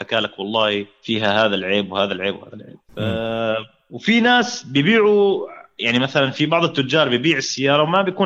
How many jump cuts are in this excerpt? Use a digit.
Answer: 0